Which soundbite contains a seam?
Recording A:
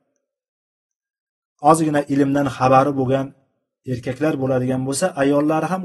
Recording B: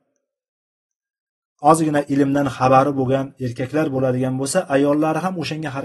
B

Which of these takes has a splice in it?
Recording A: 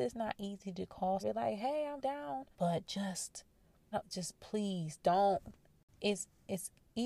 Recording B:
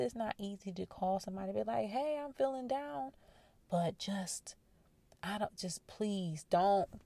A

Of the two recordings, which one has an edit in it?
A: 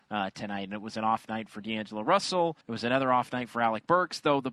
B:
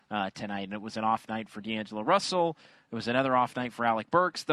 A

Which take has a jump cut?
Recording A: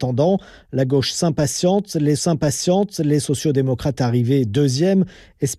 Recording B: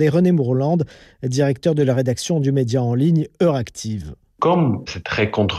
A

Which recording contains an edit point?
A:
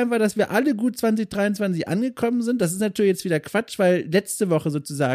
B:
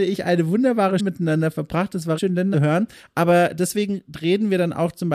B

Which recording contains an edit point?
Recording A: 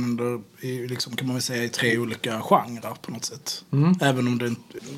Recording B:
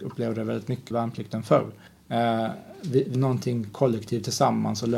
B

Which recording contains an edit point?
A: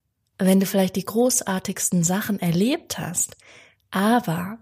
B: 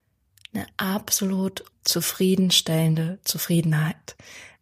B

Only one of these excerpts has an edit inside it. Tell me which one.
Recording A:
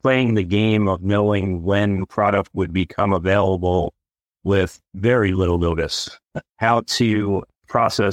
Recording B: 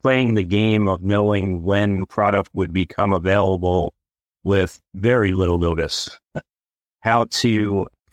A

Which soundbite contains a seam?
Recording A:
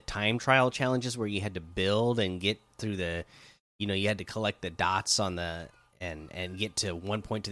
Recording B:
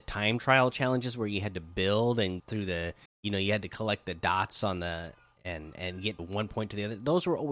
B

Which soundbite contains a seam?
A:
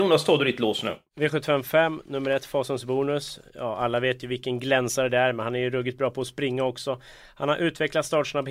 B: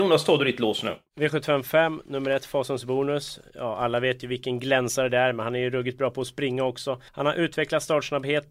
B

